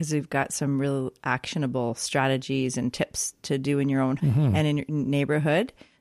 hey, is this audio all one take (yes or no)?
no